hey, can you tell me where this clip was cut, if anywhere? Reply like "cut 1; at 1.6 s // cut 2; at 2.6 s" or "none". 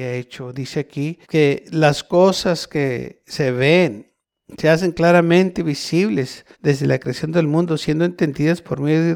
cut 1; at 1.2 s // cut 2; at 6.5 s